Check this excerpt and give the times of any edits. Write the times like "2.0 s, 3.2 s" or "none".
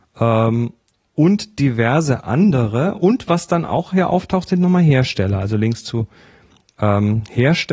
none